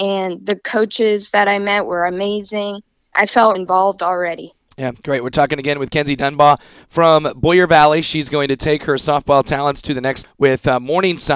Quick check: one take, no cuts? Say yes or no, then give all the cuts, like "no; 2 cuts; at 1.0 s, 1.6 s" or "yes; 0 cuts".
no; 3 cuts; at 3.1 s, 3.5 s, 10.2 s